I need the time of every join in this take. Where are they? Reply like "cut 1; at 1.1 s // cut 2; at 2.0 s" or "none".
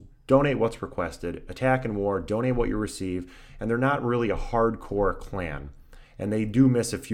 none